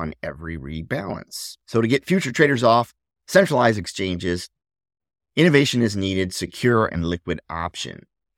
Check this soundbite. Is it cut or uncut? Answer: cut